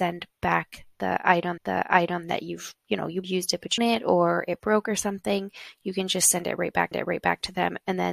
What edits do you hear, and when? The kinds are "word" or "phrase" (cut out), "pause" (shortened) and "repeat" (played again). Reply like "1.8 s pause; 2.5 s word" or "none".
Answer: 1.6 s repeat; 3.2 s phrase; 3.8 s phrase; 6.9 s repeat